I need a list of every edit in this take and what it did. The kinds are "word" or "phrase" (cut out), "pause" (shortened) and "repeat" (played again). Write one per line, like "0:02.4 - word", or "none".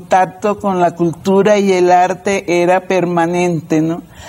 none